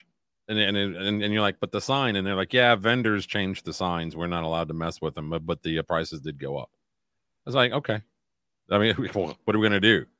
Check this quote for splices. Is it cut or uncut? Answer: uncut